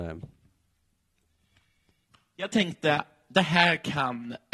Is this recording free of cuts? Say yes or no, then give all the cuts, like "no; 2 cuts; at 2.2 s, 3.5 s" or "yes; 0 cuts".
yes; 0 cuts